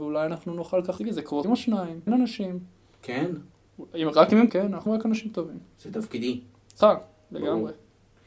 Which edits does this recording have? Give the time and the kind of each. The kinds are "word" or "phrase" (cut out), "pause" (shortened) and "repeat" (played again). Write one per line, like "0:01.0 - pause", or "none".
0:01.0 - word
0:01.4 - word
0:02.1 - word
0:04.5 - word
0:04.9 - word
0:06.8 - word